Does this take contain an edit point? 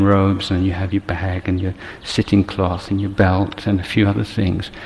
no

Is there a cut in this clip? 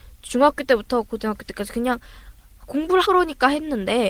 yes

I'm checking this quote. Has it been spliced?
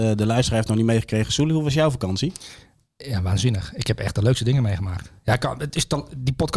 no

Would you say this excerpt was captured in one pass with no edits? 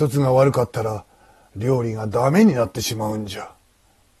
yes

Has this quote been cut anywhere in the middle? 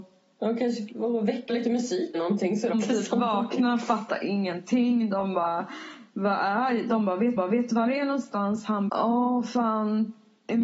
yes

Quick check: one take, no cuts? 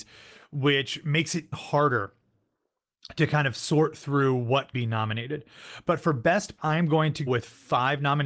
no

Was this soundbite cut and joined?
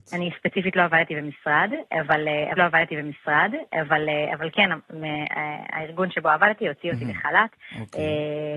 yes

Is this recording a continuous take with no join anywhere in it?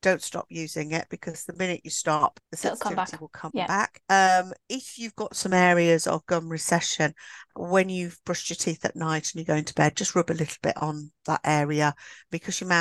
no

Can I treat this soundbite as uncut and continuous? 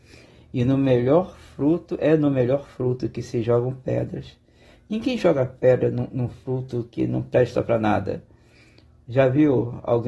yes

